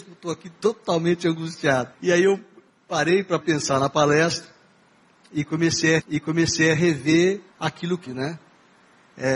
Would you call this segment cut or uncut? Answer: cut